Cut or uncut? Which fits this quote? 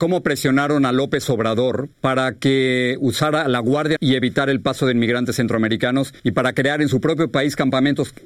cut